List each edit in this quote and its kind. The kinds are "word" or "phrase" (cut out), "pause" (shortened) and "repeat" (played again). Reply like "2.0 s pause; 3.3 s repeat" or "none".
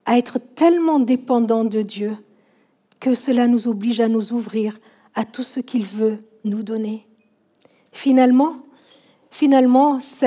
none